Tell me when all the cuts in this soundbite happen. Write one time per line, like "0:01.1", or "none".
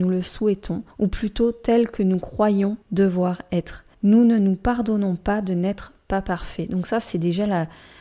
0:00.9
0:02.8
0:03.9

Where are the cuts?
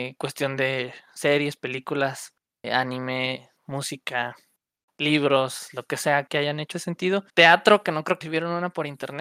0:02.6
0:03.6
0:06.3
0:06.7
0:07.3
0:08.2

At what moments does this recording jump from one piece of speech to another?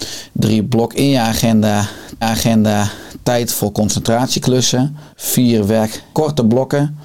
0:02.2
0:05.1
0:06.1

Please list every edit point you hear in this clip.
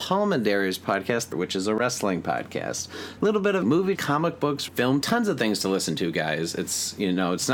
0:01.3
0:03.2
0:03.6
0:03.9
0:04.7
0:05.0

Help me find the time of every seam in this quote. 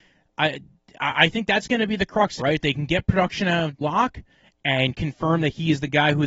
0:02.4
0:03.8

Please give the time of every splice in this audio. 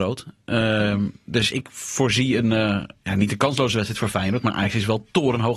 0:01.5

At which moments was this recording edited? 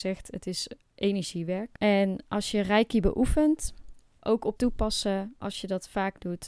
0:04.2
0:04.6

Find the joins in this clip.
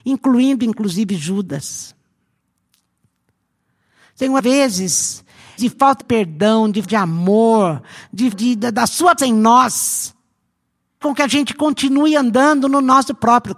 0:04.4
0:05.6
0:06.0
0:06.8
0:08.3
0:09.2
0:11.0

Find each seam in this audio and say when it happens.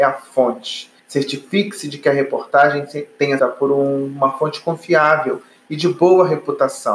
0:01.0
0:03.4

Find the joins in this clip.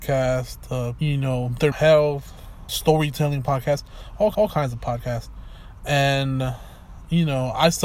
0:01.0
0:01.7
0:02.7
0:04.3

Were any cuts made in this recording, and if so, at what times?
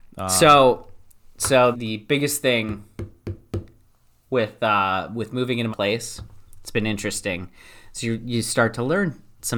0:01.7
0:05.7

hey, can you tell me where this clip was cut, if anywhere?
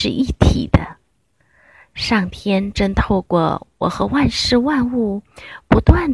none

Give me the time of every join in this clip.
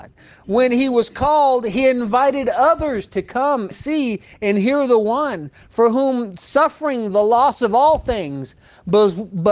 0:03.7

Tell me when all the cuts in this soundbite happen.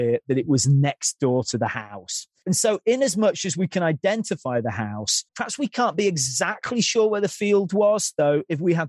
0:05.3

